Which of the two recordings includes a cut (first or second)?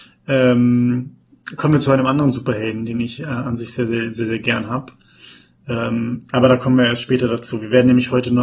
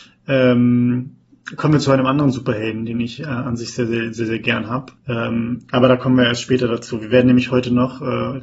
second